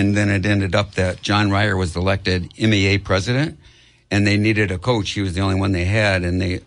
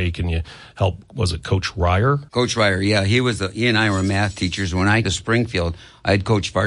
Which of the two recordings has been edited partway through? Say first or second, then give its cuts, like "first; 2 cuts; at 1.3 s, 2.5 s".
second; 2 cuts; at 2.3 s, 5.0 s